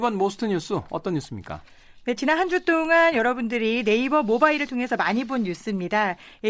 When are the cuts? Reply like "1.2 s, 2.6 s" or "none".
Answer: none